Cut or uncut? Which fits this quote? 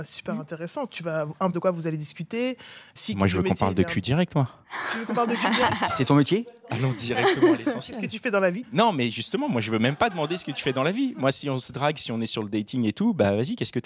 cut